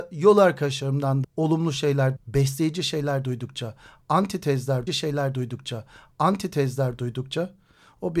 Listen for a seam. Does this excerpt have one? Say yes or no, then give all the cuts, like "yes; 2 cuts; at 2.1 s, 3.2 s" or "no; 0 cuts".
yes; 3 cuts; at 1.2 s, 2.2 s, 4.9 s